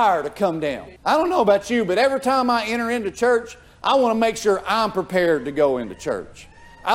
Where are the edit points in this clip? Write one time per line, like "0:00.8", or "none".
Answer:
0:01.0

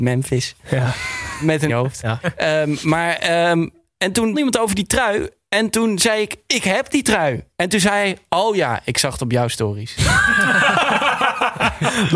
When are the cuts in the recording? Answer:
0:01.7
0:04.3

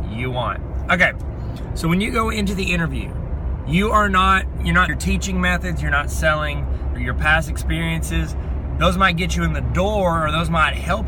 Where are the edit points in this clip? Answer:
0:04.9
0:07.0

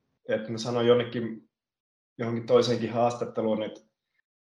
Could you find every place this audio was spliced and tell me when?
none

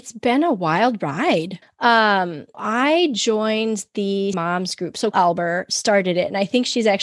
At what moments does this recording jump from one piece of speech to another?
0:01.6
0:02.5
0:04.3
0:05.1

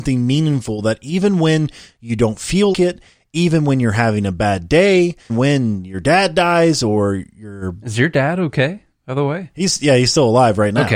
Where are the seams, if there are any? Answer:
0:02.7
0:05.3

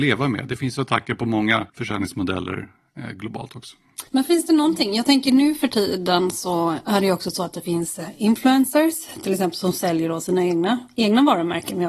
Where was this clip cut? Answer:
0:01.7
0:04.1

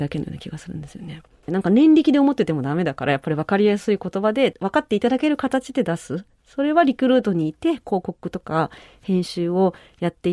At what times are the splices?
none

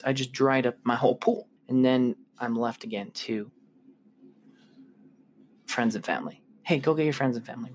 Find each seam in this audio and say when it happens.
0:01.6

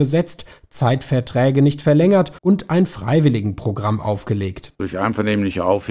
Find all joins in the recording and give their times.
0:02.4

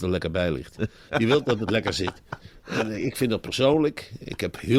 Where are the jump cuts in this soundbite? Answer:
none

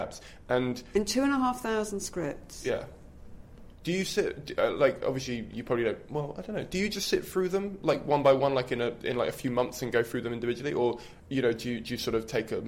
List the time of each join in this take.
0:11.2

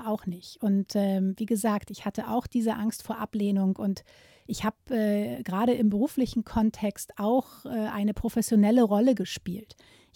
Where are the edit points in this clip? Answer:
none

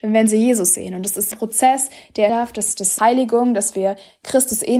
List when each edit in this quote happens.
0:01.3
0:02.3
0:03.0

